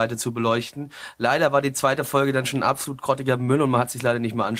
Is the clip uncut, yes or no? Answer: yes